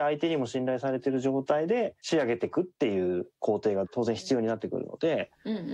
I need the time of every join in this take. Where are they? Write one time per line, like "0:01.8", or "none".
0:02.0